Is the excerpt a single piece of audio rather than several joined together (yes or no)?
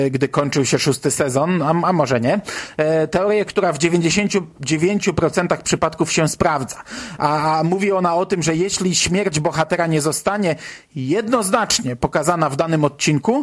yes